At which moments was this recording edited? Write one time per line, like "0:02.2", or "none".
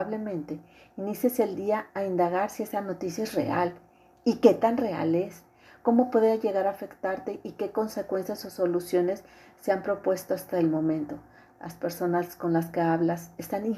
none